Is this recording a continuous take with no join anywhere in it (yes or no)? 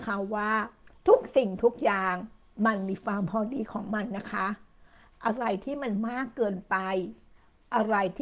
yes